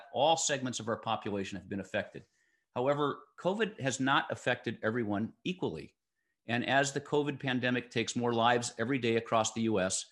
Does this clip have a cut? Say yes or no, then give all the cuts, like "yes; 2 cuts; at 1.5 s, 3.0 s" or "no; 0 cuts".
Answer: no; 0 cuts